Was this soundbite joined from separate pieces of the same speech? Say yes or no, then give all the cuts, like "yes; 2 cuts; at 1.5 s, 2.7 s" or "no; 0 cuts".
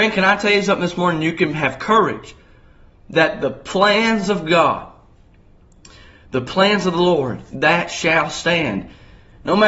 no; 0 cuts